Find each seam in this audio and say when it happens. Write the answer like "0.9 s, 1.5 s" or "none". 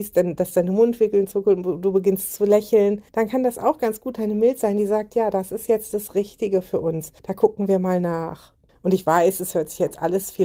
3.1 s, 7.2 s, 8.7 s

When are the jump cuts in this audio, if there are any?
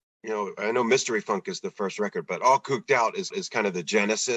3.3 s

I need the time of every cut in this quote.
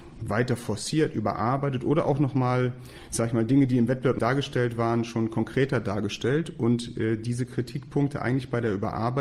4.2 s

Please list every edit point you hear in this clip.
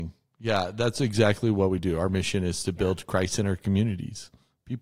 none

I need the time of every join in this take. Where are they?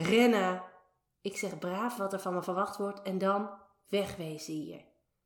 none

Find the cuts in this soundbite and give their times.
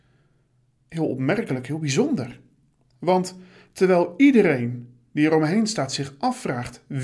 none

